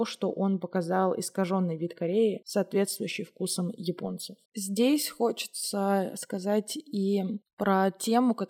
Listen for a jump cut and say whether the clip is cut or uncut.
cut